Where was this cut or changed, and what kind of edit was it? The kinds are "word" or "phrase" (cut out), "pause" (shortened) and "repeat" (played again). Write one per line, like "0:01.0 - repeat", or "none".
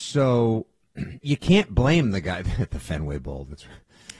0:01.2 - word

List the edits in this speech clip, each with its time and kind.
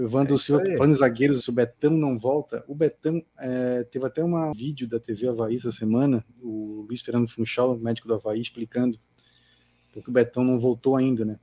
0:01.4 - word
0:04.5 - word
0:10.0 - word

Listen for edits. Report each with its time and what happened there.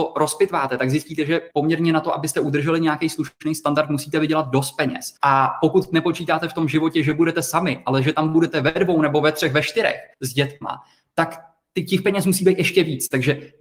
0:01.5 - pause
0:05.2 - pause
0:10.1 - pause

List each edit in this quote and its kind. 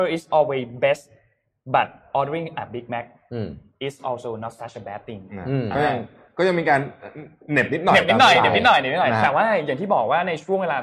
none

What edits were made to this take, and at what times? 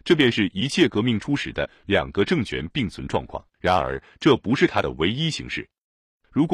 0:03.5 - pause

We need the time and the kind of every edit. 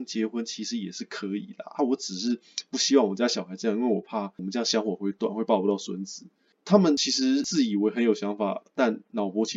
none

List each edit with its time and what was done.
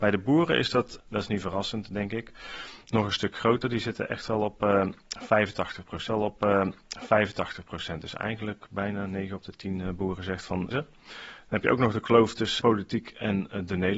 0:01.0 - word
0:06.1 - repeat
0:10.7 - phrase
0:12.6 - word

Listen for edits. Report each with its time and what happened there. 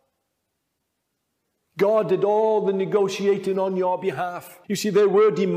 0:04.6 - pause

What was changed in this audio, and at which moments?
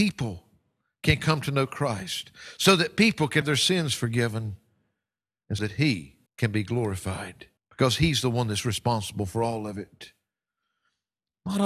0:03.4 - word
0:05.6 - word
0:06.3 - pause
0:07.6 - pause

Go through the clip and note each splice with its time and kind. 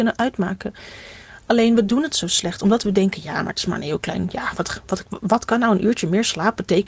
none

